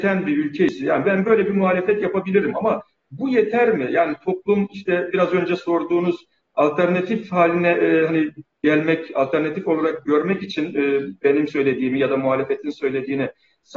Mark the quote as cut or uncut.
uncut